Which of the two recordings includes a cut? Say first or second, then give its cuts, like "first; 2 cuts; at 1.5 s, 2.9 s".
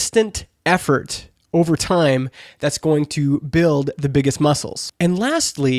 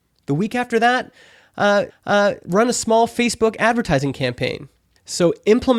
second; 1 cut; at 1.9 s